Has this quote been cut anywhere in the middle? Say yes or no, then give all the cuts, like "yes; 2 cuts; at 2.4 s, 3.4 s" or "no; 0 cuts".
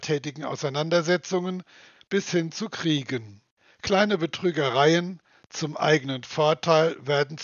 no; 0 cuts